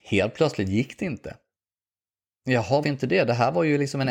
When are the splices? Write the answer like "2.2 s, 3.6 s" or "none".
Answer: 2.8 s